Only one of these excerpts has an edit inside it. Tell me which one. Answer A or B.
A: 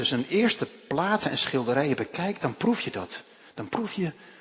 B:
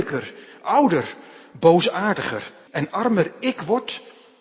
B